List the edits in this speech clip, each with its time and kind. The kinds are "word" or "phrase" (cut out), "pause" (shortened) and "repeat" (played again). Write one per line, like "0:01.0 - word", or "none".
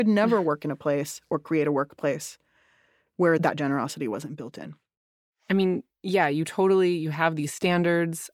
none

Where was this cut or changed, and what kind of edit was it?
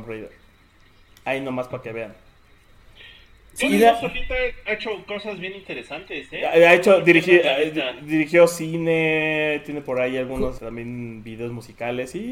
0:10.6 - word

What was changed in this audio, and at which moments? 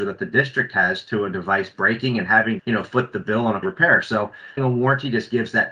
0:02.6 - word
0:03.6 - word
0:04.6 - word

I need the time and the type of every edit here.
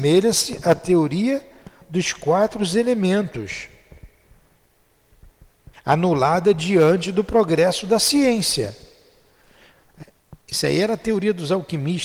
0:05.7 - pause

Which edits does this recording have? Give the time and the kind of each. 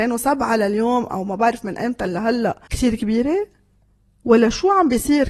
0:02.7 - pause

